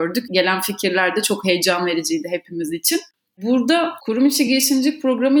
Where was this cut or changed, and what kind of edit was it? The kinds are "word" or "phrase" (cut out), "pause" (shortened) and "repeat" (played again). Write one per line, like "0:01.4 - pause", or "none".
none

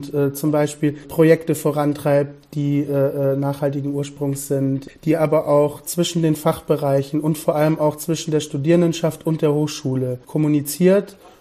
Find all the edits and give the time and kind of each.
none

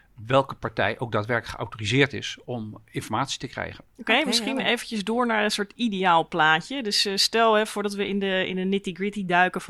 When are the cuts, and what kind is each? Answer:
0:03.9 - pause

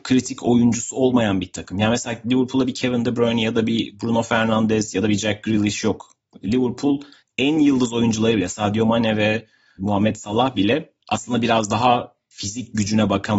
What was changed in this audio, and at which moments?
none

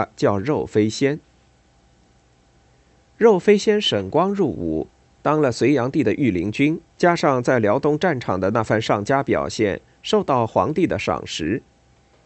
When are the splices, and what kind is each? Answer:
0:06.9 - pause

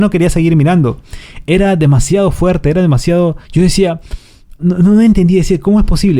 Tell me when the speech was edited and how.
0:03.4 - pause
0:04.6 - word

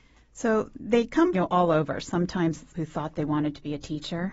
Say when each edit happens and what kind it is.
0:01.3 - phrase
0:02.7 - word

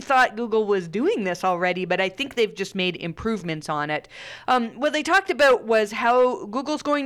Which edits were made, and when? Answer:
none

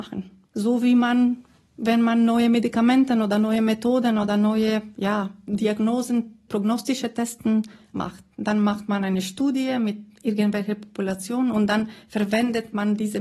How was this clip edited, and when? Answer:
none

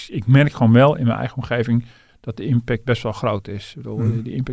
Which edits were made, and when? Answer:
none

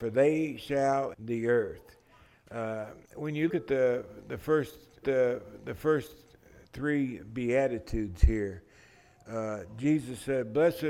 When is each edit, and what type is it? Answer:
0:01.1 - word
0:03.0 - pause
0:03.5 - word
0:05.0 - repeat

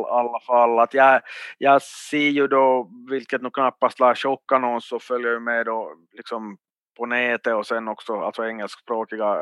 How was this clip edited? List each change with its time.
0:04.8 - word
0:06.0 - pause

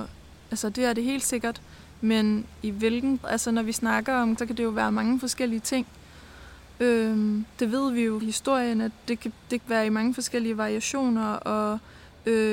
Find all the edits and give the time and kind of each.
0:03.2 - word
0:04.4 - word
0:08.2 - word
0:09.6 - word

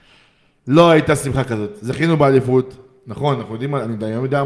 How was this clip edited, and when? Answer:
none

